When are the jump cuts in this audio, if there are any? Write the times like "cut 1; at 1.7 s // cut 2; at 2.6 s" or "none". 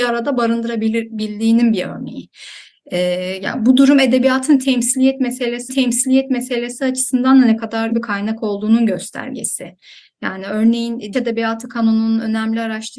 cut 1; at 5.7 s // cut 2; at 7.9 s // cut 3; at 11.1 s